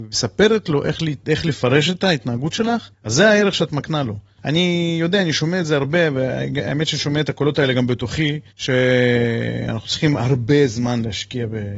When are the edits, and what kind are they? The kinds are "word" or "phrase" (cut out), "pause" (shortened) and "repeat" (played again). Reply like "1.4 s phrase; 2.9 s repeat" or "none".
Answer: 2.9 s pause; 8.5 s pause